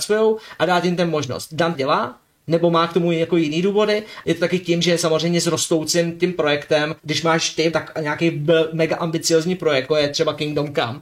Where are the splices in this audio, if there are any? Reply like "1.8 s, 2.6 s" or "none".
1.7 s, 4.2 s, 7.0 s, 7.7 s, 9.9 s